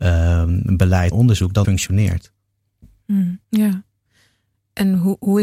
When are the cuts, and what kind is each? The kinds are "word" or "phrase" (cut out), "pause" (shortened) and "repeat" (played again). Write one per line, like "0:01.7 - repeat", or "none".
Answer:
0:01.1 - word
0:01.6 - word
0:03.4 - pause